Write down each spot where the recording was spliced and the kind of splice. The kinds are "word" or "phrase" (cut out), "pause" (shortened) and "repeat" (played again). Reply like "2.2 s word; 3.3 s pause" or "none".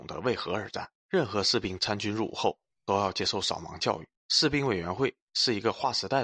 1.0 s pause; 4.2 s pause